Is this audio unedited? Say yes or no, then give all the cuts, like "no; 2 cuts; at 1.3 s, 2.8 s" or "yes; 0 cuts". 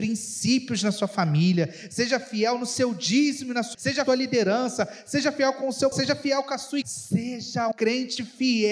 no; 5 cuts; at 3.7 s, 4.1 s, 5.9 s, 6.8 s, 7.7 s